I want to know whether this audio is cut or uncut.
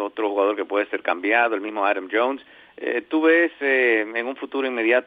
uncut